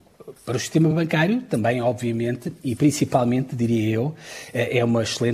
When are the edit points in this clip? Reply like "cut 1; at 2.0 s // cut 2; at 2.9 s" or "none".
none